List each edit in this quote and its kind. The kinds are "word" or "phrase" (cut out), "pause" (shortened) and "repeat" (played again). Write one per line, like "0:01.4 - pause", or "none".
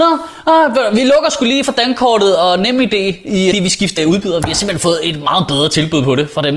0:03.5 - phrase
0:04.0 - word